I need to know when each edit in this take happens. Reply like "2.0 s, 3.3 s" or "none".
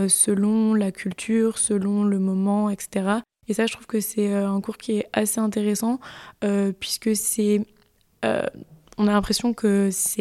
none